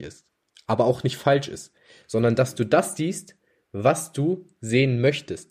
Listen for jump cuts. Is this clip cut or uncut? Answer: uncut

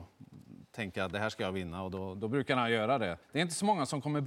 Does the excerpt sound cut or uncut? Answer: cut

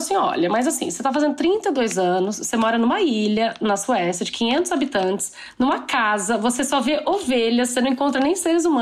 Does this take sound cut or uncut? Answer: uncut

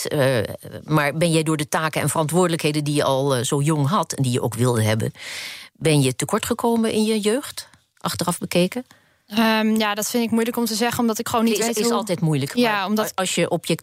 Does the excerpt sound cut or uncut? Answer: uncut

